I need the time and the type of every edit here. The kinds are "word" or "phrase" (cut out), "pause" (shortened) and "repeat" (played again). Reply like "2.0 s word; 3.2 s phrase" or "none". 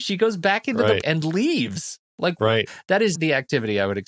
1.0 s word; 2.1 s pause; 3.2 s word